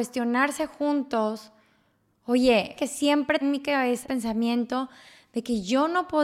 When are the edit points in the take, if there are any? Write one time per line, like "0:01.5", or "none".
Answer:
0:02.8
0:03.4
0:04.0